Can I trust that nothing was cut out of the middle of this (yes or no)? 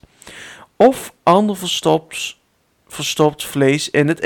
yes